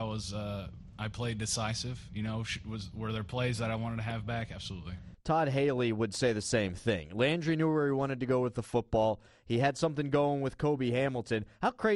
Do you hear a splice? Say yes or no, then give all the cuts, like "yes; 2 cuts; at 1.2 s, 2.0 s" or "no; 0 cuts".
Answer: no; 0 cuts